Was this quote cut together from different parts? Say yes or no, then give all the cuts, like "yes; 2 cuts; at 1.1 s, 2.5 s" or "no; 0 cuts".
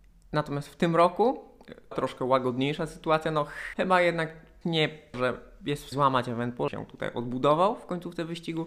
yes; 6 cuts; at 1.9 s, 3.7 s, 4.6 s, 5.1 s, 5.9 s, 6.7 s